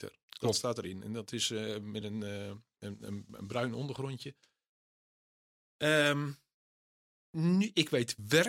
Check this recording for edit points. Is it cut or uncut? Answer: uncut